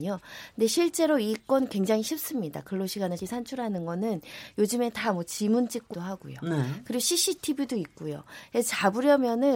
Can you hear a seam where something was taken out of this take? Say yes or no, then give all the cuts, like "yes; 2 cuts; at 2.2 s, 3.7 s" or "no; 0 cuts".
yes; 2 cuts; at 3.2 s, 5.9 s